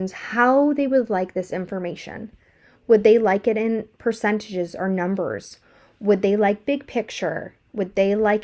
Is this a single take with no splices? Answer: yes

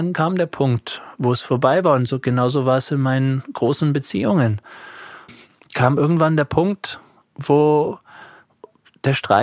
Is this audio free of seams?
yes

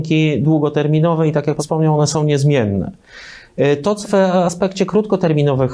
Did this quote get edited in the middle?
yes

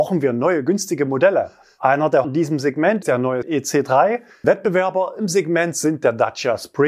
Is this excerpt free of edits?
no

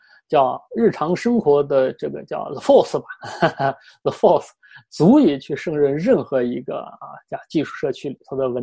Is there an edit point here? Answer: no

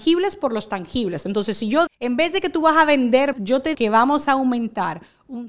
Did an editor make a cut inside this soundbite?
yes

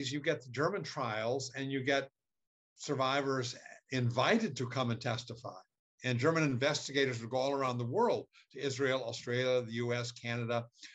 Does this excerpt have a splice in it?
no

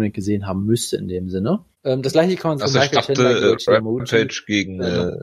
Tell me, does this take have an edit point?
yes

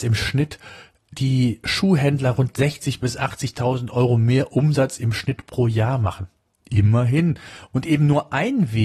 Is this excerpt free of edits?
yes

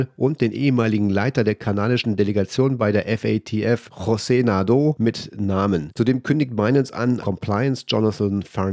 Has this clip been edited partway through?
yes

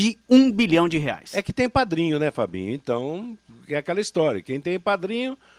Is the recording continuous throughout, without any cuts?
yes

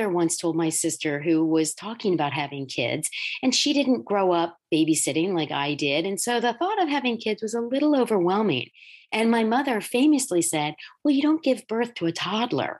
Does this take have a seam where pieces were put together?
no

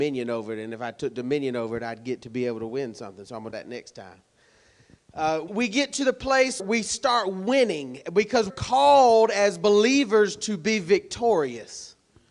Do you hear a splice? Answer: yes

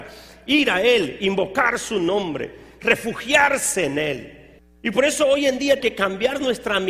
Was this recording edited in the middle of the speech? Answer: yes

